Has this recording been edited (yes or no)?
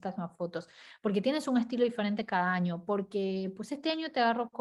no